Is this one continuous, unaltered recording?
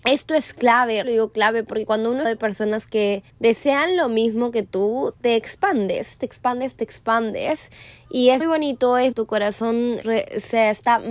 no; 7 cuts; at 1.0 s, 2.2 s, 3.3 s, 6.2 s, 8.4 s, 9.1 s, 10.0 s

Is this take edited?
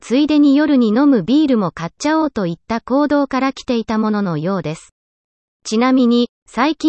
no; 0 cuts

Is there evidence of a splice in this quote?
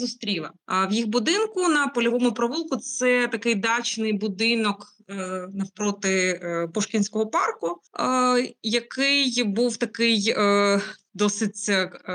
yes; 1 cut; at 7.9 s

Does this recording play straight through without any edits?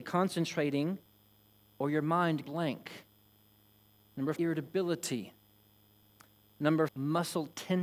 no; 3 cuts; at 2.4 s, 4.4 s, 6.9 s

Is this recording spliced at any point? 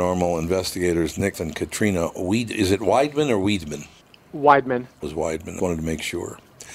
yes; 4 cuts; at 1.3 s, 4.0 s, 5.0 s, 5.6 s

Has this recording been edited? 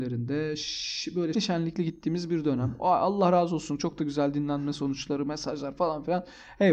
yes; 1 cut; at 1.3 s

